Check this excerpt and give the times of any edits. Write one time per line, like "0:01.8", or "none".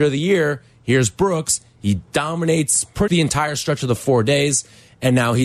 0:02.1
0:03.1